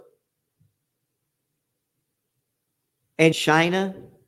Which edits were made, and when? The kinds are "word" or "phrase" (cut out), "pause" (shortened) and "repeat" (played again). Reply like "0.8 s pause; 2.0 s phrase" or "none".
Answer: 3.3 s word